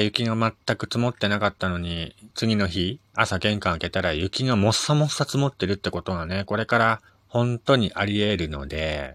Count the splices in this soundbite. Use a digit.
3